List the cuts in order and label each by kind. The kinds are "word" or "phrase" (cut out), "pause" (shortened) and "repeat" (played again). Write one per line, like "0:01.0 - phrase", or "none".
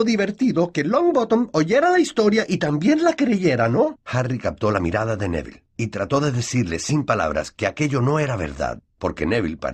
0:04.0 - pause

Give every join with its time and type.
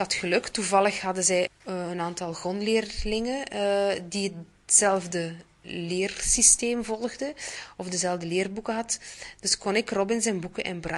0:01.5 - word

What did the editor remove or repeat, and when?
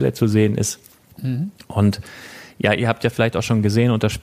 none

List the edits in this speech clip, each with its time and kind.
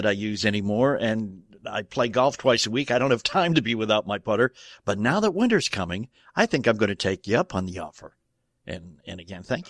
none

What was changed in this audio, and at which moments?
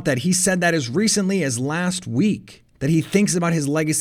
0:02.7 - pause

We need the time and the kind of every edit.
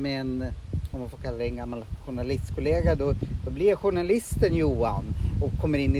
none

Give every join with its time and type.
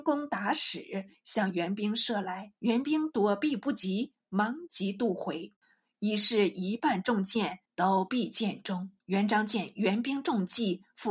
0:02.6 - pause
0:07.7 - pause
0:09.0 - pause

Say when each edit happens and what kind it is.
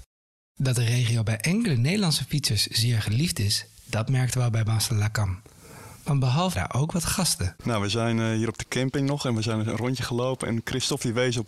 0:06.5 - phrase

